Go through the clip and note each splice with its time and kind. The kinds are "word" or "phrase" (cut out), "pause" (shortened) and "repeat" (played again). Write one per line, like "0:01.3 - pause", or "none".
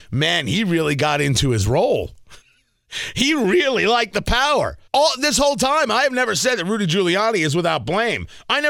0:02.4 - pause
0:04.9 - pause